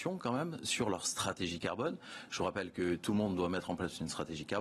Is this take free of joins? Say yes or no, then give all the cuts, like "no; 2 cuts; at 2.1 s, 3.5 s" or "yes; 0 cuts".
yes; 0 cuts